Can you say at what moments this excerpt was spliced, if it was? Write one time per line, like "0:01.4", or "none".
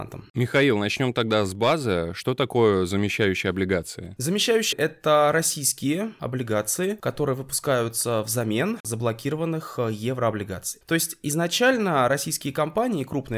0:04.7